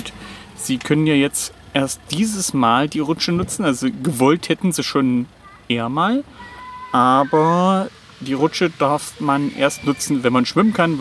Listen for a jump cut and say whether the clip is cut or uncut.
uncut